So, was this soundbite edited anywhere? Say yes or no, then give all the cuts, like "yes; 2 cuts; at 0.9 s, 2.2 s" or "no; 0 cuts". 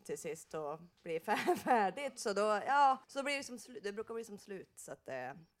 yes; 2 cuts; at 0.9 s, 3.0 s